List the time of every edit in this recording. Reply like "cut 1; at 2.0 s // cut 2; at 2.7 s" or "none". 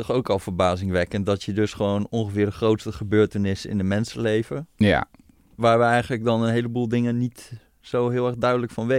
none